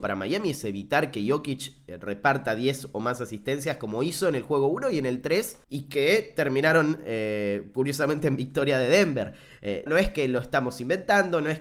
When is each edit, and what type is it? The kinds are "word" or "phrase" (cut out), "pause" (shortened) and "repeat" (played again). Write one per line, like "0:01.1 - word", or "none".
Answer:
0:05.6 - pause
0:09.9 - word